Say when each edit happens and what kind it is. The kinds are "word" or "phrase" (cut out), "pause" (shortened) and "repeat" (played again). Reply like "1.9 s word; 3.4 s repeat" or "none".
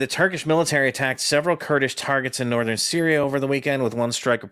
none